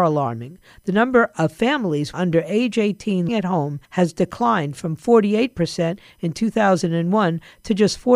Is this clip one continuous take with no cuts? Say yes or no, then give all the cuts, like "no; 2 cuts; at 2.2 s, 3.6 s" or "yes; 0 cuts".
no; 3 cuts; at 2.1 s, 3.3 s, 3.8 s